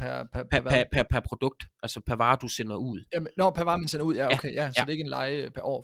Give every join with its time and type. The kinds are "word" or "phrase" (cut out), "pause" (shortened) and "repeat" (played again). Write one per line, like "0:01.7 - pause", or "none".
0:01.1 - word

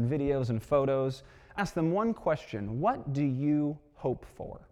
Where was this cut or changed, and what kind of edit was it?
0:01.6 - word

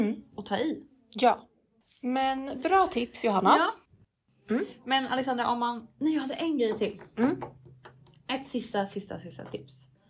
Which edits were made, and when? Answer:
none

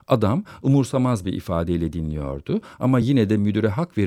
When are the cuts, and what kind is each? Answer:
none

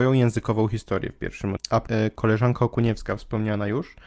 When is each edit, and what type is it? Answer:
0:01.6 - word
0:01.9 - word

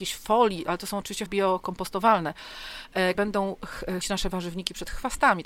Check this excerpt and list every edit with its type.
0:01.3 - word
0:03.1 - word
0:04.0 - word

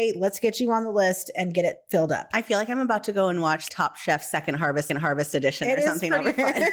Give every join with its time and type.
0:03.7 - word
0:04.9 - repeat

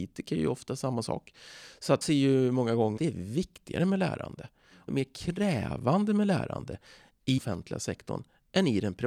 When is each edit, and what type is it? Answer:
0:02.0 - word
0:03.0 - word
0:04.9 - word
0:07.4 - word

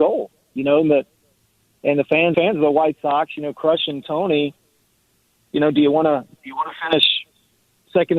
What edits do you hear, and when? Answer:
0:02.3 - phrase

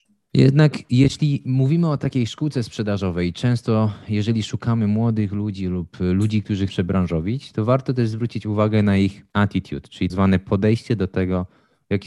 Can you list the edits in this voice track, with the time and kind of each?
0:06.7 - phrase
0:09.3 - pause
0:10.1 - word

